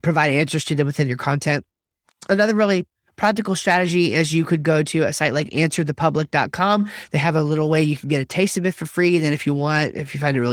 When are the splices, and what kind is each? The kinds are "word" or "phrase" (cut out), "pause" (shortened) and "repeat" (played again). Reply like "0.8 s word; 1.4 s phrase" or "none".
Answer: none